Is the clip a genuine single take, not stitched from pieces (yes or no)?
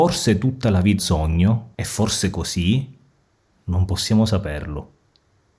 no